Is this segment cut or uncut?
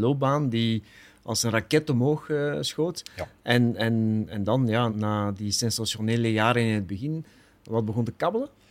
cut